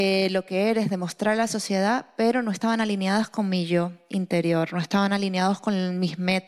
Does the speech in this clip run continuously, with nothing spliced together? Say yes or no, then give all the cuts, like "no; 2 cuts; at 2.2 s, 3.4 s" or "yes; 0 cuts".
yes; 0 cuts